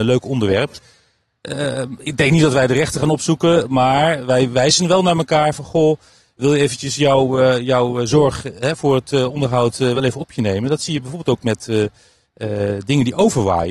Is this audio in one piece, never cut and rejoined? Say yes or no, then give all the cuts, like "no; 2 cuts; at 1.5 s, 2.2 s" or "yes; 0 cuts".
yes; 0 cuts